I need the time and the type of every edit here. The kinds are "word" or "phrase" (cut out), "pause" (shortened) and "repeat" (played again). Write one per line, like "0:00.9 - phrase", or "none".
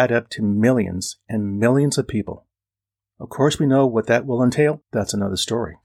0:02.7 - pause
0:04.8 - word

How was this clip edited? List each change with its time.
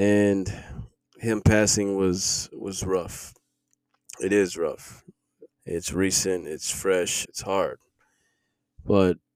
0:01.0 - pause
0:05.5 - pause
0:07.2 - word

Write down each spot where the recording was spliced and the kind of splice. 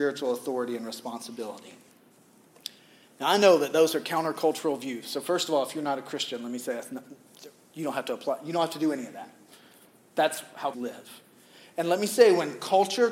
0:10.7 - word

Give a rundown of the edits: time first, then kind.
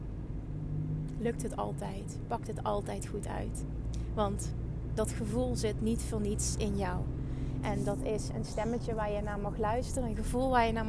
none

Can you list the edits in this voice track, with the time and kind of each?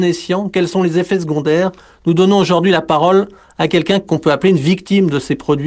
none

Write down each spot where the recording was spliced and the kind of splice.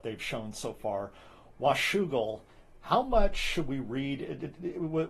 none

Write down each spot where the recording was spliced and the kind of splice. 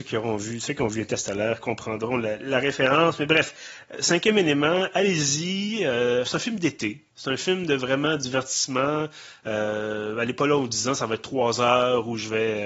0:07.1 - pause

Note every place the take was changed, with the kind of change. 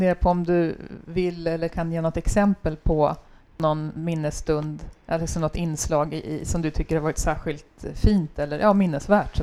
none

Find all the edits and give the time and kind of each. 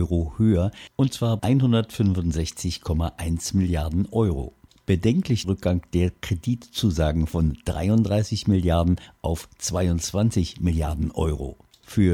0:01.4 - word
0:05.4 - phrase

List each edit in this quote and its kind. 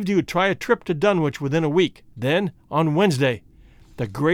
0:02.1 - pause

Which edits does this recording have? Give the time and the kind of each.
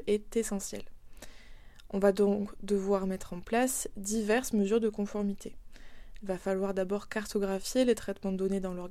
none

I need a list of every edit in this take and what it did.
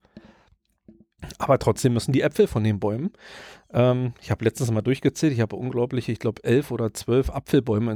none

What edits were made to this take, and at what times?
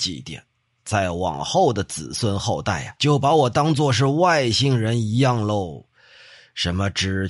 0:03.0 - word

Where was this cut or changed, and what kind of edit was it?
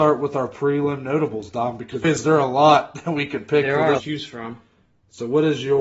0:02.0 - word
0:04.0 - word

